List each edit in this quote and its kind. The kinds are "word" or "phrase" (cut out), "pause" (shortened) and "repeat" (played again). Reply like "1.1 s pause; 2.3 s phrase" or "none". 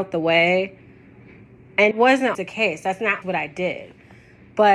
1.9 s word; 2.3 s word; 3.2 s word

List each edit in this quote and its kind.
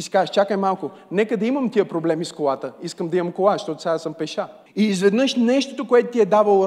4.7 s pause

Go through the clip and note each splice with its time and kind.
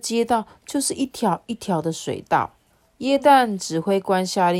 2.7 s pause

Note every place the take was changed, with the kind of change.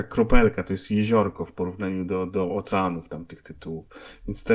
none

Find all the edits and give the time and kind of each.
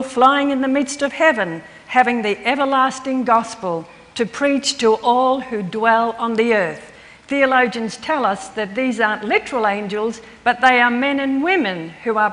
none

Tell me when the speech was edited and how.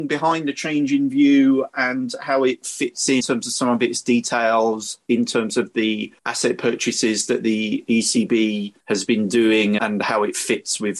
3.2 s word; 6.2 s pause; 8.8 s pause; 9.8 s word

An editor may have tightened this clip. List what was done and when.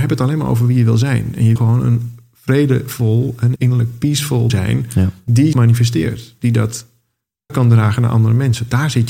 1.6 s word; 3.6 s word; 4.5 s word; 5.5 s word; 7.5 s word

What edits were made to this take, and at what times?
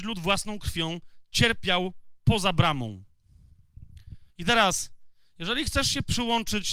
4.3 s pause

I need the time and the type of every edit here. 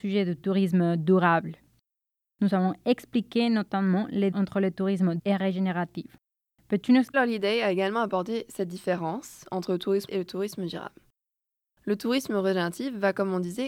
4.3 s word; 5.2 s word; 7.1 s phrase; 10.1 s word

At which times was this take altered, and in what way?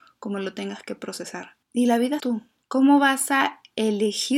1.6 s pause; 2.2 s phrase

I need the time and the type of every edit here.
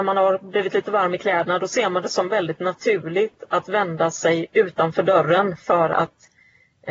none

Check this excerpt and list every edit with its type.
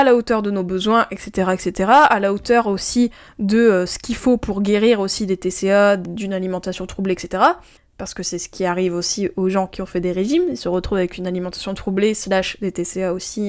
none

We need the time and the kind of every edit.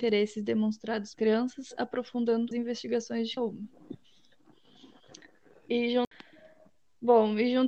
1.1 s word; 2.5 s word; 3.4 s word

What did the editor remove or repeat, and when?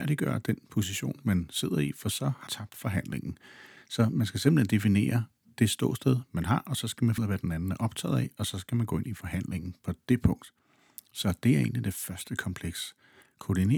2.5 s word; 7.2 s word

